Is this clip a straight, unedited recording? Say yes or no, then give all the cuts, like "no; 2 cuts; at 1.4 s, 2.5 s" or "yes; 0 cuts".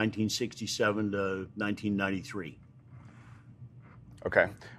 no; 1 cut; at 1.5 s